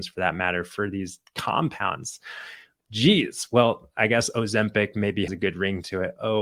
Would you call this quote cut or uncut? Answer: cut